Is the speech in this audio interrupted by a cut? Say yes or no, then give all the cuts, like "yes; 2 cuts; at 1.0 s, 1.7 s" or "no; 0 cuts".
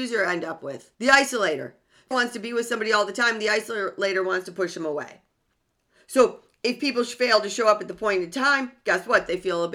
yes; 3 cuts; at 0.9 s, 2.1 s, 5.6 s